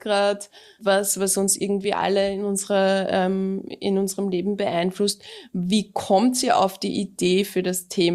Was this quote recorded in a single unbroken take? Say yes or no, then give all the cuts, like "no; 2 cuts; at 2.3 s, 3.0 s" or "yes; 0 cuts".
yes; 0 cuts